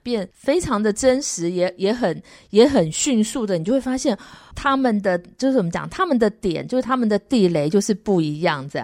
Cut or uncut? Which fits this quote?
uncut